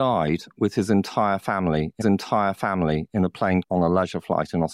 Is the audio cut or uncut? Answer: cut